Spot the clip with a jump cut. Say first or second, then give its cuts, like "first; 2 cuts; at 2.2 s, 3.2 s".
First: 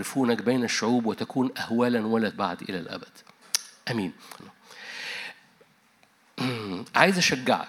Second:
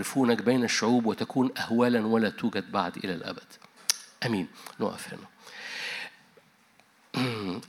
first; 2 cuts; at 2.3 s, 4.4 s